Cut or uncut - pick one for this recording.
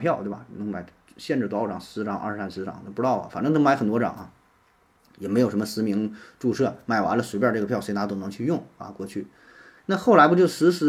cut